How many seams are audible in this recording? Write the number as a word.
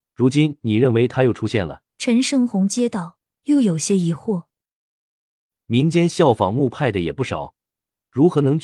one